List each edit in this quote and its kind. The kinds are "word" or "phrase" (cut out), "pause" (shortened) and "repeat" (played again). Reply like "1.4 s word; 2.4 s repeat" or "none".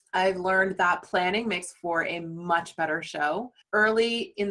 3.6 s pause